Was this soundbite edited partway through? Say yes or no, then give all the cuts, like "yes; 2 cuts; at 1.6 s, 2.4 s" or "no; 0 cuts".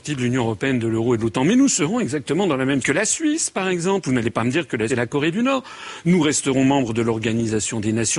yes; 2 cuts; at 2.8 s, 4.9 s